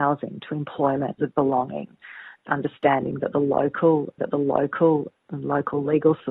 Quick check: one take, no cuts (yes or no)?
no